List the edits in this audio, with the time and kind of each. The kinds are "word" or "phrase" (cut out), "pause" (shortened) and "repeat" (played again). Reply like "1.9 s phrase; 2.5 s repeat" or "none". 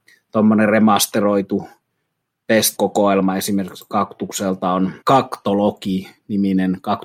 2.8 s word; 5.0 s pause